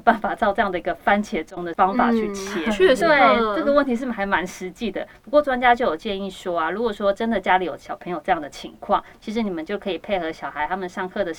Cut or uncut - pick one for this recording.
cut